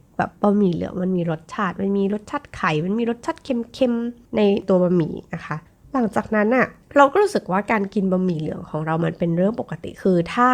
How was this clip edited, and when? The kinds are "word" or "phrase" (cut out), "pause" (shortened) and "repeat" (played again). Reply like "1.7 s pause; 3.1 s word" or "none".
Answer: none